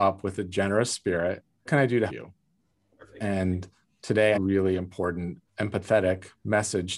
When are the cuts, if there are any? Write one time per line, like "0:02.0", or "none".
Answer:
0:01.7
0:02.1
0:04.3
0:05.5